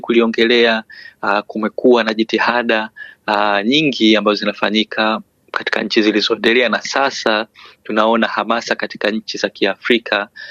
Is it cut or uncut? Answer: uncut